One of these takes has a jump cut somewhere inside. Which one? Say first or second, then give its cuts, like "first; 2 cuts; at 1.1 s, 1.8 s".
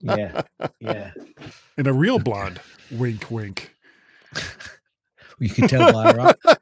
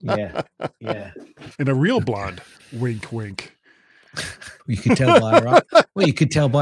second; 2 cuts; at 1.5 s, 4.6 s